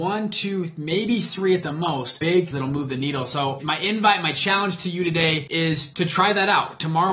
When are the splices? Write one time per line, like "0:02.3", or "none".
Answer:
0:02.5
0:03.6

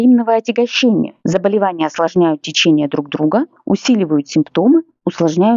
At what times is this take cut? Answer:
0:01.2

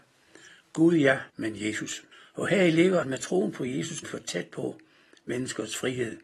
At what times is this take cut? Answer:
0:01.3
0:02.1
0:03.0
0:04.0

